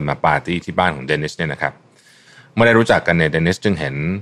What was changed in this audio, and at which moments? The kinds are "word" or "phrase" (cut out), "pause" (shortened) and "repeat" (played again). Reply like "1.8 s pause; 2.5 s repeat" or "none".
none